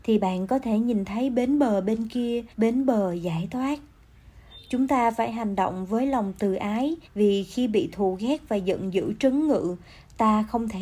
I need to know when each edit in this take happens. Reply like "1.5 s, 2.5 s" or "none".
2.5 s, 7.0 s

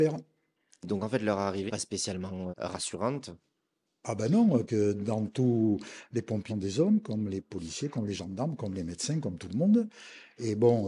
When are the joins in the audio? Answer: 1.7 s, 2.5 s, 4.7 s, 6.5 s

